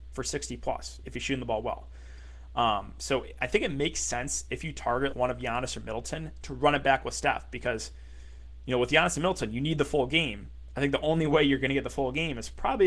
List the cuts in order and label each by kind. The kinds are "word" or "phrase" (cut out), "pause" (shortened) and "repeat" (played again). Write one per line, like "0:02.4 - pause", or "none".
0:01.0 - word
0:05.1 - word